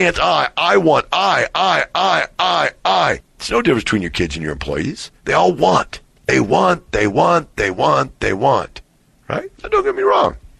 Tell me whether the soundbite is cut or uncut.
cut